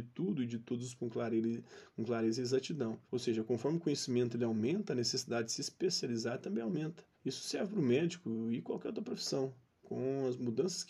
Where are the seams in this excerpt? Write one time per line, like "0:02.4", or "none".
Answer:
0:01.0
0:03.1
0:07.1